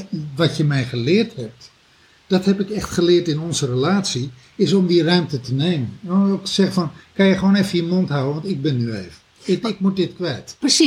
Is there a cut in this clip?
no; 0 cuts

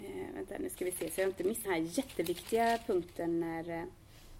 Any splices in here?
yes; 1 cut; at 1.7 s

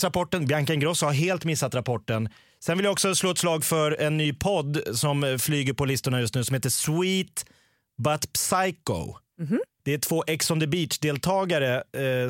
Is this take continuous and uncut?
yes; 0 cuts

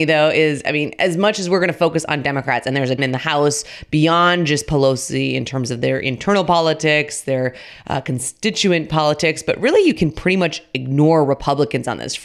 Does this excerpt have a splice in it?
yes; 1 cut; at 3.0 s

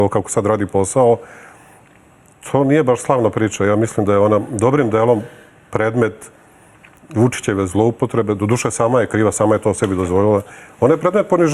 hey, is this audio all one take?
yes; 0 cuts

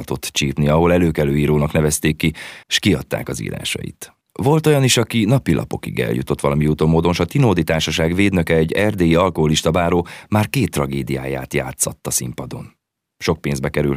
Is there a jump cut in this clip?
yes; 3 cuts; at 2.6 s, 4.2 s, 12.9 s

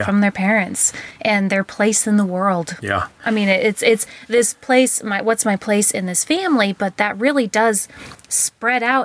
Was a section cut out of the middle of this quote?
no; 0 cuts

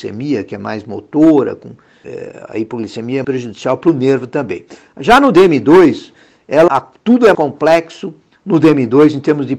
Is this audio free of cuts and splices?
no; 4 cuts; at 2.0 s, 3.2 s, 6.7 s, 7.3 s

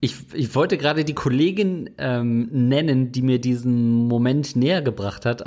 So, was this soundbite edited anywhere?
no; 0 cuts

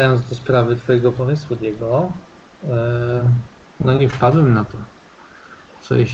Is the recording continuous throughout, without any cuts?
no; 1 cut; at 3.5 s

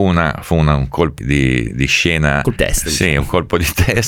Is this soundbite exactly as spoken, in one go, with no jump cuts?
no; 3 cuts; at 1.2 s, 1.7 s, 2.6 s

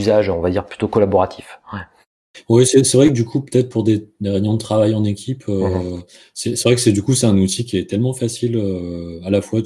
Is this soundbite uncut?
yes; 0 cuts

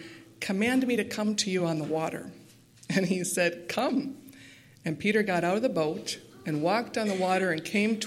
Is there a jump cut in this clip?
no; 0 cuts

